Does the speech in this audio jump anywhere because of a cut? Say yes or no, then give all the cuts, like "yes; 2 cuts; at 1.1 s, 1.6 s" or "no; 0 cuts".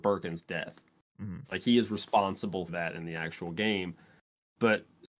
yes; 1 cut; at 2.7 s